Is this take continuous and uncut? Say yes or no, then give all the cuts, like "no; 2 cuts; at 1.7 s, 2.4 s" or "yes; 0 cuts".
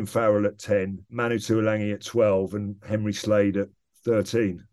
yes; 0 cuts